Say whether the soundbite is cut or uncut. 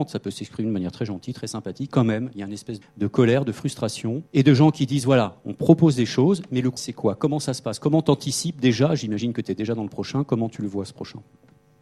cut